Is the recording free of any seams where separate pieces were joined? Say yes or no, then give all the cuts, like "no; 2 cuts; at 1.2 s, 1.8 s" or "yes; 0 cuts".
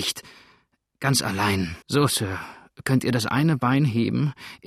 no; 1 cut; at 1.8 s